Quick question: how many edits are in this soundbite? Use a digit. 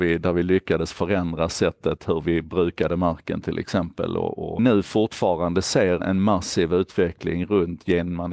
2